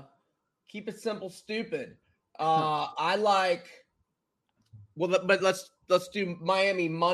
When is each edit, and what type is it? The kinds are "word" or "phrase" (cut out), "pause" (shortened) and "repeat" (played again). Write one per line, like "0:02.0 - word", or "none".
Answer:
none